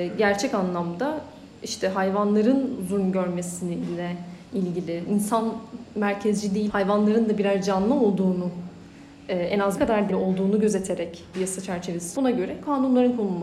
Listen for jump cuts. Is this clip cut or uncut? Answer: cut